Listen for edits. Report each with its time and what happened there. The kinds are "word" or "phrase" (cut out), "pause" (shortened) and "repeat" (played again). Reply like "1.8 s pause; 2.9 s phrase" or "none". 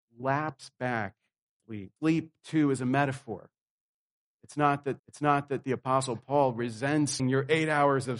1.6 s word; 2.0 s pause; 5.0 s repeat; 7.2 s phrase